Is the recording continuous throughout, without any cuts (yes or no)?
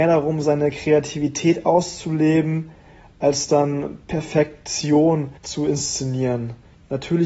no